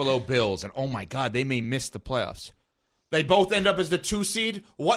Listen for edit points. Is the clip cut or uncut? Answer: uncut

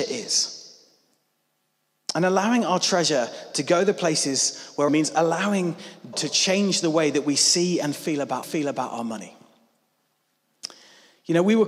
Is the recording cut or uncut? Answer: cut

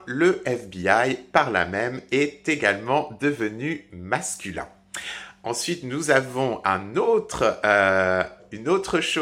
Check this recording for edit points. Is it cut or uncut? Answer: uncut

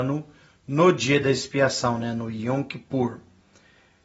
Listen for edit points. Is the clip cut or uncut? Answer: uncut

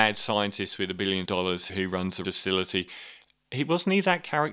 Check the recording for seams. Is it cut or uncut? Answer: cut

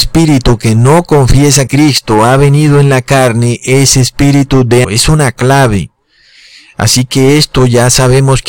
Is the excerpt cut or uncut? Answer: cut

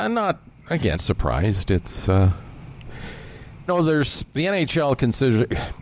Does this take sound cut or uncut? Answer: cut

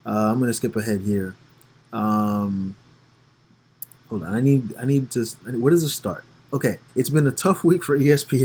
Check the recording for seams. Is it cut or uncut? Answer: cut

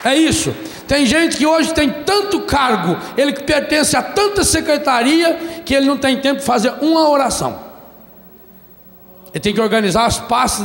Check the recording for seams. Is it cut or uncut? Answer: uncut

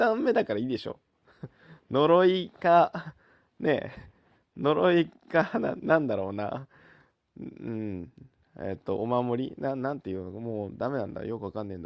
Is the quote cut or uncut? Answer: uncut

